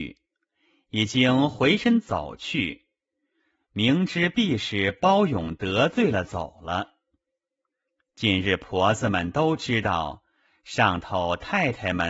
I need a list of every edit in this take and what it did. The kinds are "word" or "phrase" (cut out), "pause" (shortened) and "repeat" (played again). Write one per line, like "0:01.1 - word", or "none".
none